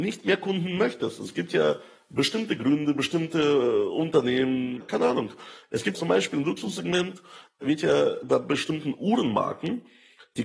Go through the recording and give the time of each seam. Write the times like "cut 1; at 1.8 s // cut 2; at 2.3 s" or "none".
cut 1; at 4.8 s // cut 2; at 5.9 s